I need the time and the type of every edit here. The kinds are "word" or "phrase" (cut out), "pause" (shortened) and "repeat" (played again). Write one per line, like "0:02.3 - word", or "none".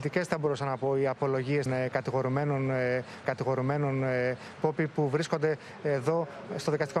0:01.7 - word
0:03.2 - repeat